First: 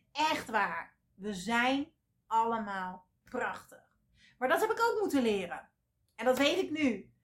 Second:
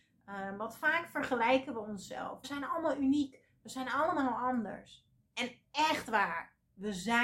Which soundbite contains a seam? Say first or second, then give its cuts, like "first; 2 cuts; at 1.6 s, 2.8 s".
second; 2 cuts; at 2.4 s, 5.2 s